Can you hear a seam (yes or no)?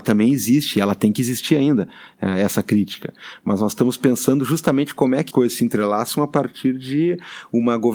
yes